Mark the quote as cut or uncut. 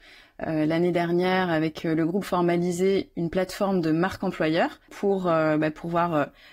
cut